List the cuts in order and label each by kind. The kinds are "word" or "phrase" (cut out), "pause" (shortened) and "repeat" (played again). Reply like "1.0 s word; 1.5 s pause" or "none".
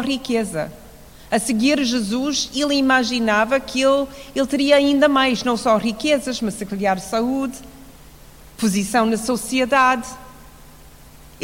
none